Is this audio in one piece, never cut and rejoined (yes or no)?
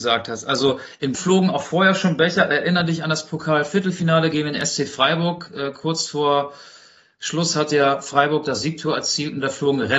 no